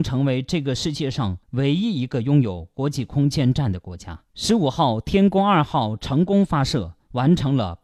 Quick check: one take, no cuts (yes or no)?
no